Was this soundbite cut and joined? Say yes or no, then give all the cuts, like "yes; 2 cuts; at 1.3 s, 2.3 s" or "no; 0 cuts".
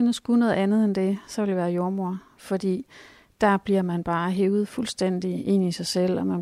no; 0 cuts